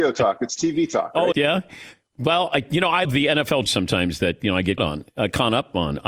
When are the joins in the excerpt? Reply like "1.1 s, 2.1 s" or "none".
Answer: 1.3 s, 3.0 s, 3.7 s, 4.8 s